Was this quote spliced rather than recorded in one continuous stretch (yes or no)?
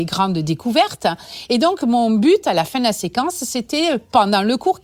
no